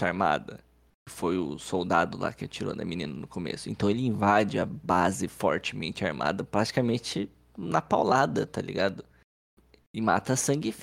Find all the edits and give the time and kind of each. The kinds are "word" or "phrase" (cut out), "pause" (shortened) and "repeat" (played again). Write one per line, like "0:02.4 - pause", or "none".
none